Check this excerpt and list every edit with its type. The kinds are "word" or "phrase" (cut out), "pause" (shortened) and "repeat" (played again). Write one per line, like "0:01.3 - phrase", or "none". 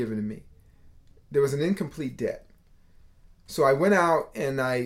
none